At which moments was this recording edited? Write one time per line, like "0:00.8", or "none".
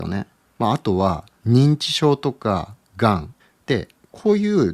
0:03.4